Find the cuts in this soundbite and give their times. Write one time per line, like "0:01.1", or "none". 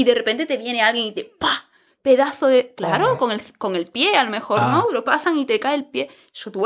none